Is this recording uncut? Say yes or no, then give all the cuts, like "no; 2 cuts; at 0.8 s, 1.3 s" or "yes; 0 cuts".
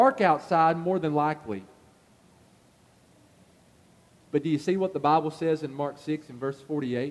yes; 0 cuts